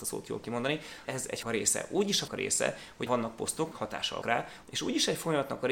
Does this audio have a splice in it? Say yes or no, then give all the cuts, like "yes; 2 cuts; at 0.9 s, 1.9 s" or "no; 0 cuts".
yes; 6 cuts; at 1.0 s, 1.4 s, 2.3 s, 3.1 s, 3.7 s, 4.2 s